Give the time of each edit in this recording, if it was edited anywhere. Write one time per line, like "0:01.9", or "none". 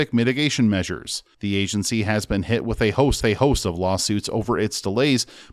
0:03.2